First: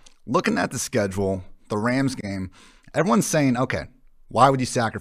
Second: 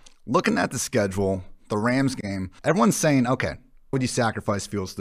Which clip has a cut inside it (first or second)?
second